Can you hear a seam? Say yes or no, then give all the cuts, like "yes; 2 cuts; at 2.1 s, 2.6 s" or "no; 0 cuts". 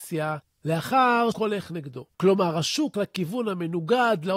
yes; 3 cuts; at 1.3 s, 2.1 s, 2.9 s